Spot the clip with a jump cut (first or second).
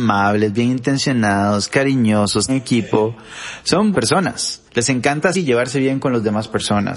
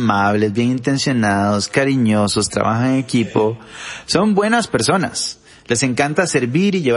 first